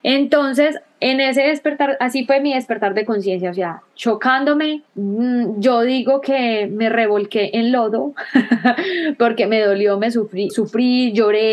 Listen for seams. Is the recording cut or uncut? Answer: cut